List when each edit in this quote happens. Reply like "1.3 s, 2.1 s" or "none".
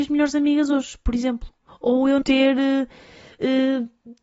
1.7 s, 2.2 s